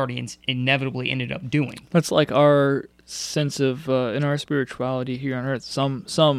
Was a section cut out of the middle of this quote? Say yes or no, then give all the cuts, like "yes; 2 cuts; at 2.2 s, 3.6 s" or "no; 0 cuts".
no; 0 cuts